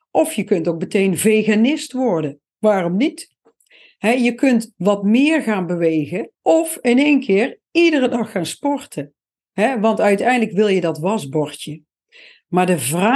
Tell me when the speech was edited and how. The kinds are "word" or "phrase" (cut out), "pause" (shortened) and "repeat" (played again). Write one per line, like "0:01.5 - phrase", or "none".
0:02.5 - pause
0:06.3 - pause
0:09.4 - pause